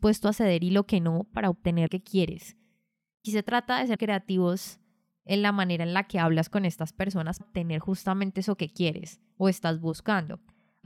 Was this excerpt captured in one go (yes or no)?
no